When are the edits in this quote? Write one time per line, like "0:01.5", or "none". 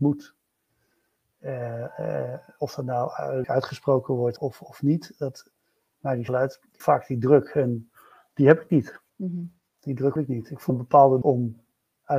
0:03.4
0:04.4
0:06.3
0:06.8
0:09.1
0:10.2
0:10.7
0:11.2